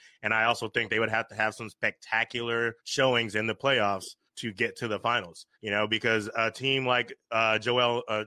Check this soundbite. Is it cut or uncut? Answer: cut